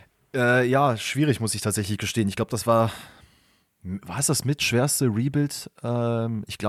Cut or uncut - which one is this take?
uncut